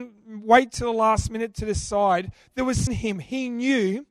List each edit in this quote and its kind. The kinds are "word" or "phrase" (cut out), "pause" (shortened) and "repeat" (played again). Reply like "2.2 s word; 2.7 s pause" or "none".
2.9 s phrase